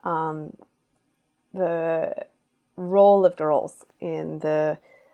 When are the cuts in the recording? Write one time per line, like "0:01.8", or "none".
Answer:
0:03.4